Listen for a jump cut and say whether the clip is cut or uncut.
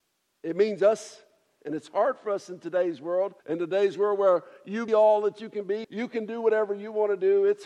cut